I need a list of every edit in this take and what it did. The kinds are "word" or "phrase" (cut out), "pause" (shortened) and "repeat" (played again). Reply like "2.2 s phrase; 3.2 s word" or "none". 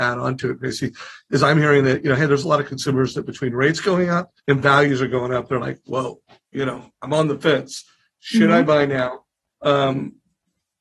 4.4 s pause

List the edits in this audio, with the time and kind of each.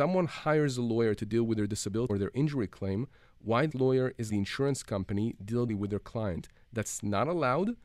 2.1 s word; 3.7 s word; 4.3 s word; 5.7 s word

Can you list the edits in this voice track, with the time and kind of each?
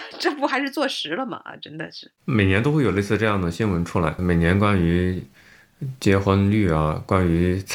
2.2 s pause; 4.2 s word

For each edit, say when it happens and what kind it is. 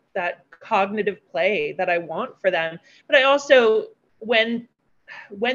none

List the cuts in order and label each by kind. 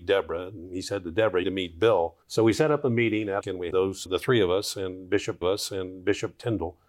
1.4 s word; 2.2 s pause; 3.4 s phrase; 3.7 s word; 4.1 s word; 5.4 s repeat

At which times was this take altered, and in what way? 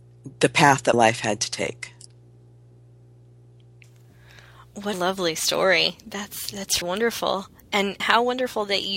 0.9 s word; 4.9 s word; 6.8 s word; 8.0 s word

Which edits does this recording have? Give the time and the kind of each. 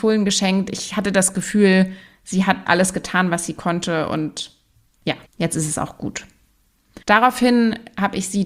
2.7 s word; 5.3 s pause; 7.0 s pause

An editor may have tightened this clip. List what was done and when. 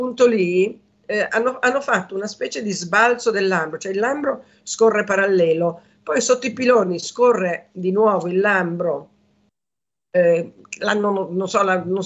none

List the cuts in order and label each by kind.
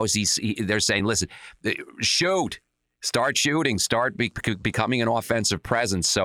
none

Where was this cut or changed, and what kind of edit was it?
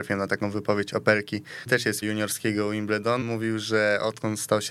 1.7 s word; 2.0 s word; 3.2 s word

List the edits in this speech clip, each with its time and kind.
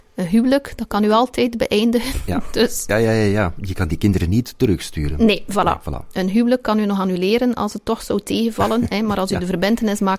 none

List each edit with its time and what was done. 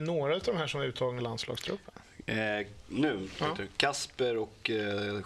1.2 s phrase

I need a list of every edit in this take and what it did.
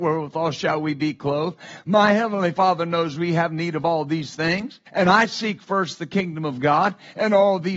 4.9 s pause

